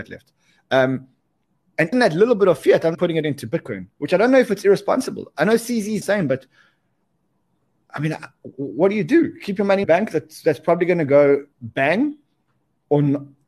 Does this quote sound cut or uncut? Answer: cut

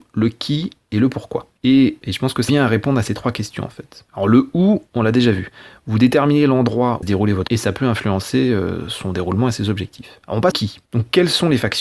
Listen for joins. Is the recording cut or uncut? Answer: cut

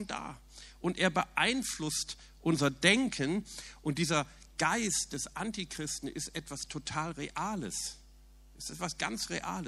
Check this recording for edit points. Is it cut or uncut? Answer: uncut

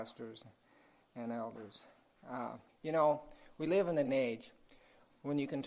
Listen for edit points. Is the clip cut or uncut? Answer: cut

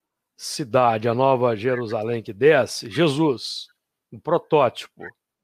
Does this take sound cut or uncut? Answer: uncut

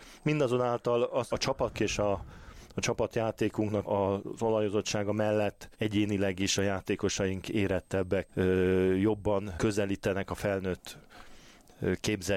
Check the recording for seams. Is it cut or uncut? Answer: cut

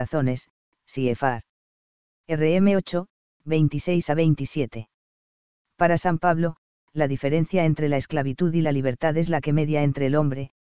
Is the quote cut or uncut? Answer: uncut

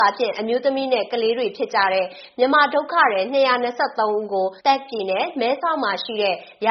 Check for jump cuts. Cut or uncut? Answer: cut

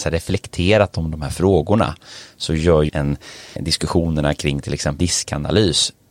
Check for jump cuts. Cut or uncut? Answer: cut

